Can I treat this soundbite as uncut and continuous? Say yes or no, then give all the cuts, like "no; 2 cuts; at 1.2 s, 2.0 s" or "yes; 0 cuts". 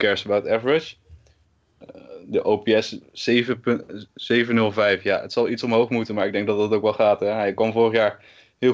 yes; 0 cuts